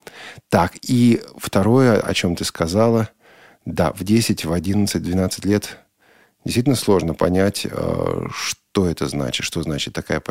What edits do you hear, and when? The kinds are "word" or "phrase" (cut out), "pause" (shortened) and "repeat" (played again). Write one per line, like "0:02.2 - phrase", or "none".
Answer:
none